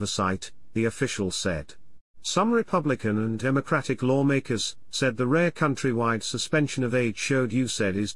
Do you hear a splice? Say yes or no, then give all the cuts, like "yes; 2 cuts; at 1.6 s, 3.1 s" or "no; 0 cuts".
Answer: yes; 1 cut; at 2.1 s